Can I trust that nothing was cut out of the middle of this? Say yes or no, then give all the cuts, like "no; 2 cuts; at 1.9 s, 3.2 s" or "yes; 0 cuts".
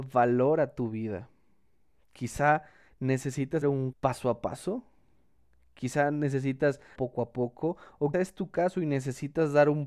no; 4 cuts; at 3.6 s, 3.9 s, 7.0 s, 8.1 s